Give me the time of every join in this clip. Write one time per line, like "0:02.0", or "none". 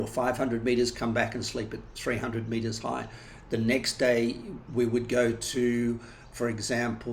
none